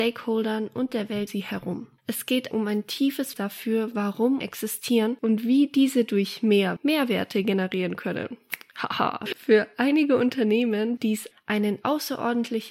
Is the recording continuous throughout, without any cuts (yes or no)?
no